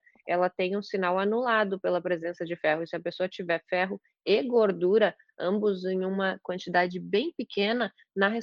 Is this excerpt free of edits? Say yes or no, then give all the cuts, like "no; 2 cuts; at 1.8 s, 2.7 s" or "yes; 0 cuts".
yes; 0 cuts